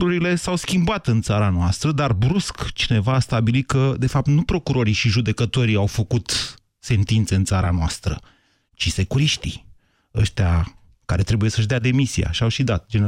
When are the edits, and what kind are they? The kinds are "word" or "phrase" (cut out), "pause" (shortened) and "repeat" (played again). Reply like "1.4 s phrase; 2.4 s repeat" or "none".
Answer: none